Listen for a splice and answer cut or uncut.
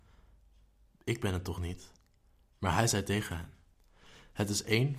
uncut